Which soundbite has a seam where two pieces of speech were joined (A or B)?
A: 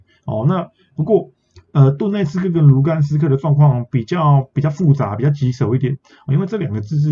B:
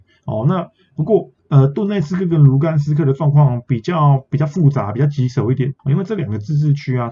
B